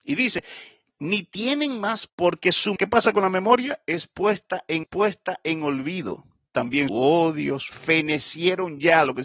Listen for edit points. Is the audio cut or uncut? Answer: cut